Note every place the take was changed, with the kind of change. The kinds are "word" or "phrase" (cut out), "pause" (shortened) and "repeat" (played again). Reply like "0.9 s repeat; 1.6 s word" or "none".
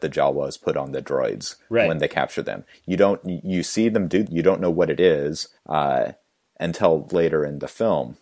4.3 s word; 5.6 s pause; 7.1 s word